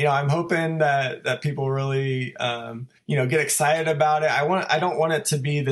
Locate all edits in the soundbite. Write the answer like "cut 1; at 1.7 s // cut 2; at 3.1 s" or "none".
cut 1; at 3.0 s

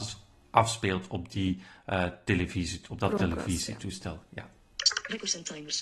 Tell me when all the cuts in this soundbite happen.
none

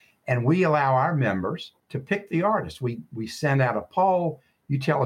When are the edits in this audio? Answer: cut 1; at 1.8 s

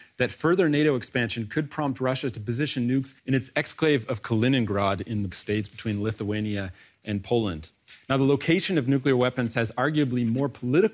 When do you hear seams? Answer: cut 1; at 3.2 s // cut 2; at 5.3 s

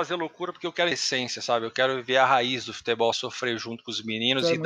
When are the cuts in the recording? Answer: cut 1; at 0.9 s // cut 2; at 3.1 s

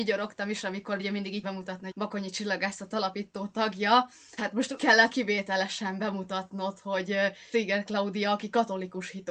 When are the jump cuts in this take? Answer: cut 1; at 1.0 s // cut 2; at 1.4 s // cut 3; at 1.9 s // cut 4; at 2.9 s // cut 5; at 4.4 s // cut 6; at 4.8 s // cut 7; at 5.1 s // cut 8; at 7.5 s

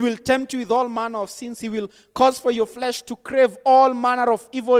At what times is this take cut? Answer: none

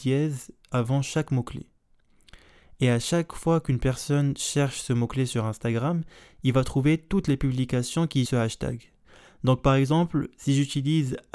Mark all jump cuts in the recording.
cut 1; at 8.3 s

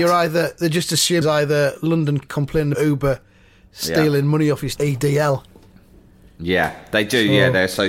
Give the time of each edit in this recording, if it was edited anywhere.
cut 1; at 1.2 s // cut 2; at 2.2 s // cut 3; at 2.7 s // cut 4; at 4.8 s

